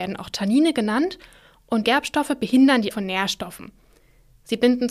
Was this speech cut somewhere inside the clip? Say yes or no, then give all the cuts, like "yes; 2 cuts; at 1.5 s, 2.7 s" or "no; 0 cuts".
yes; 2 cuts; at 1.8 s, 2.9 s